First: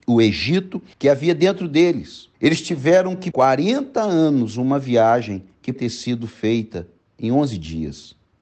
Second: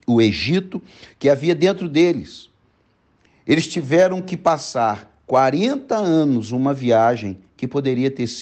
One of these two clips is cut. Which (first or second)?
first